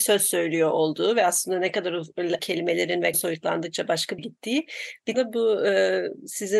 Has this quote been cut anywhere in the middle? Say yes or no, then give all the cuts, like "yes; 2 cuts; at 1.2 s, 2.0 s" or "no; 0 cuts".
yes; 4 cuts; at 2.4 s, 3.1 s, 4.2 s, 5.1 s